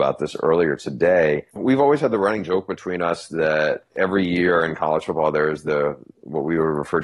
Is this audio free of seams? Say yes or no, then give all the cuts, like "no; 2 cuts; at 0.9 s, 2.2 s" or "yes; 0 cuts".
no; 1 cut; at 1.5 s